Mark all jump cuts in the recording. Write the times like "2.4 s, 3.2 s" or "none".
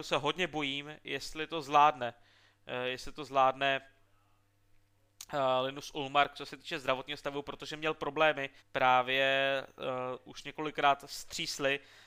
8.6 s